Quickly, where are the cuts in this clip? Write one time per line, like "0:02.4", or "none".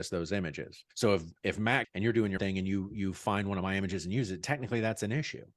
0:00.9
0:01.8
0:02.4